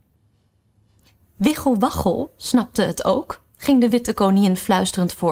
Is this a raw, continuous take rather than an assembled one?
yes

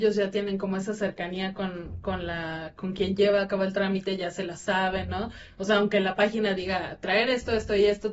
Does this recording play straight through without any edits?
yes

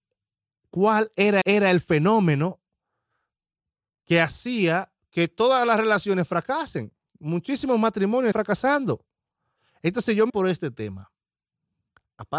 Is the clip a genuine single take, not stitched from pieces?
no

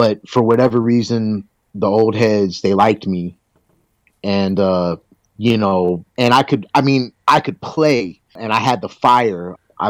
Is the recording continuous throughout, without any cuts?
yes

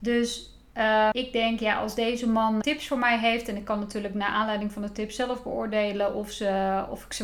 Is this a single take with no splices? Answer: no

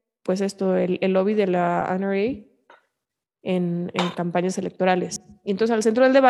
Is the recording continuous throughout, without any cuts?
yes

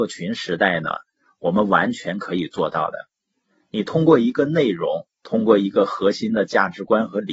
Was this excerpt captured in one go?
yes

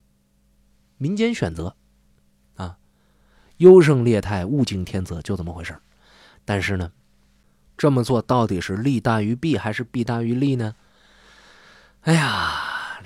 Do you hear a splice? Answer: no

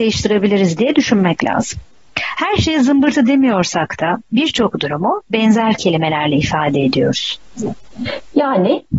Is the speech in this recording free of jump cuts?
yes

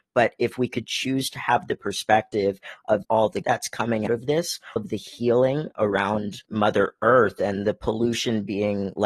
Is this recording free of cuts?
no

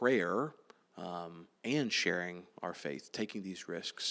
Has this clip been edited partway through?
yes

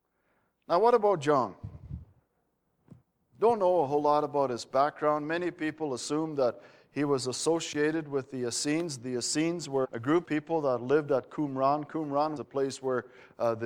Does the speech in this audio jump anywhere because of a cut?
yes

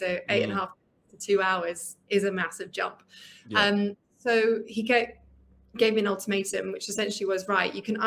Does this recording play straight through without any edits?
yes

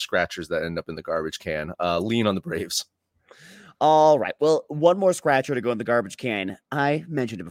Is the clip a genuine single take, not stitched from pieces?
yes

